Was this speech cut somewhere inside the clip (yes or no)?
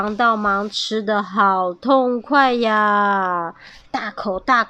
no